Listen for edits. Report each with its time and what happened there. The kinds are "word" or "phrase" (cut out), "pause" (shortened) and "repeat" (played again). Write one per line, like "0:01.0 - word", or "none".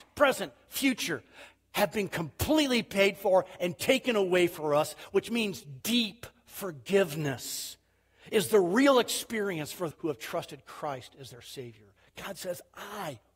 0:05.8 - word
0:09.9 - word